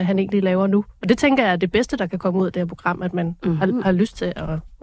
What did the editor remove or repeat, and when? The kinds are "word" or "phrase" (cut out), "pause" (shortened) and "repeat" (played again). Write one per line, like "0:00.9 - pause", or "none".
none